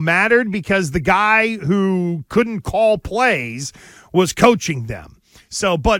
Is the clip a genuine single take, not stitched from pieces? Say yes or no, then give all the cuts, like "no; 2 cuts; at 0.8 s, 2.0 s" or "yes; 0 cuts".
yes; 0 cuts